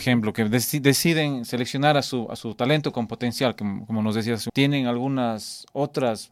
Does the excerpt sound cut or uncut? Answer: cut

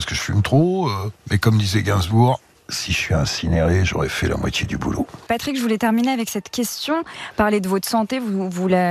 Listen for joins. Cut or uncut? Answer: uncut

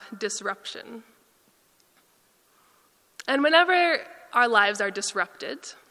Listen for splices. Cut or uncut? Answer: uncut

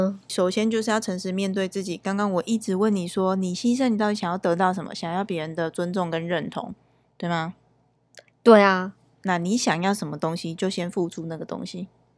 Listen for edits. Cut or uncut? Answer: uncut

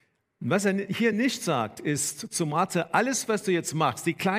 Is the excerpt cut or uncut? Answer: uncut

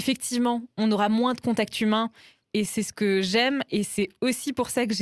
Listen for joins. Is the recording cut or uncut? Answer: uncut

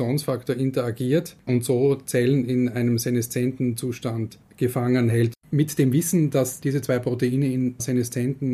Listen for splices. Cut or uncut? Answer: cut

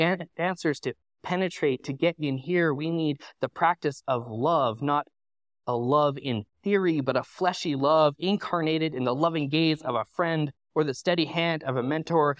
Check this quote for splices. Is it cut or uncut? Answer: uncut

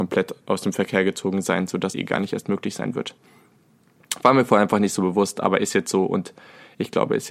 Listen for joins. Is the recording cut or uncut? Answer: cut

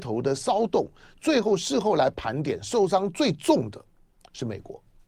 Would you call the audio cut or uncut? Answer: uncut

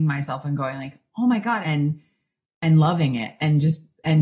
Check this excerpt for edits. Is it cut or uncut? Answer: cut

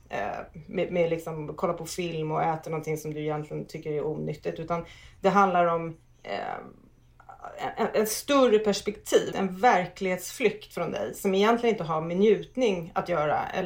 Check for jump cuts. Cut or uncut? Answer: cut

